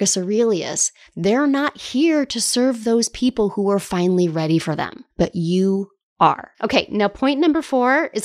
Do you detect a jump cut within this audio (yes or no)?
yes